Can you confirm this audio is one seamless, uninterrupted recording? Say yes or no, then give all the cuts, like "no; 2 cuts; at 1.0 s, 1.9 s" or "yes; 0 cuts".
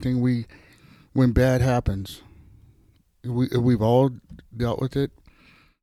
yes; 0 cuts